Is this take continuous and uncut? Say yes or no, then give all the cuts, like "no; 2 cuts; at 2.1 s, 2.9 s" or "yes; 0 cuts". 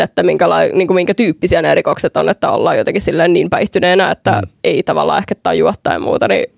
yes; 0 cuts